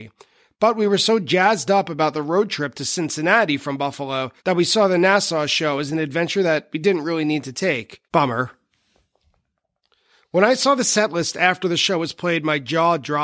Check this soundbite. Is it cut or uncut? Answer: cut